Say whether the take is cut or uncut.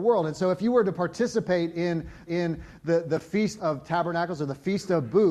cut